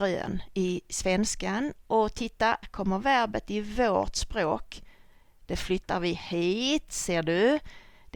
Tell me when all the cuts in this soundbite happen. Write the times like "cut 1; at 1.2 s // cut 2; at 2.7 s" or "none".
cut 1; at 2.6 s